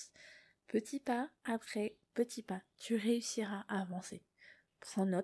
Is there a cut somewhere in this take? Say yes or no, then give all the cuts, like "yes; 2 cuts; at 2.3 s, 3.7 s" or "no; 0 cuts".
no; 0 cuts